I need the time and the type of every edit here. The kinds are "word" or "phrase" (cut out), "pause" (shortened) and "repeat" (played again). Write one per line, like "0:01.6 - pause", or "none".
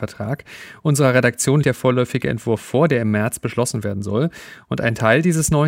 0:01.6 - word